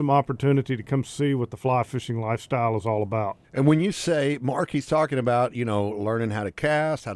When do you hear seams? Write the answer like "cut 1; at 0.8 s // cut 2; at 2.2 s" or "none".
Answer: cut 1; at 3.4 s